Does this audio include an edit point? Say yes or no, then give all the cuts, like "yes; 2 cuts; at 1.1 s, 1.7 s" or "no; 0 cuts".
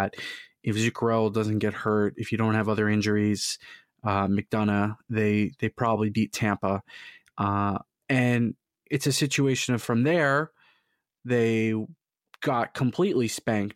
no; 0 cuts